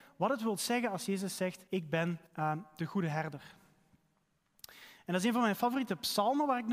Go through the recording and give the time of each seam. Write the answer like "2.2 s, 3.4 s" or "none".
1.7 s, 2.3 s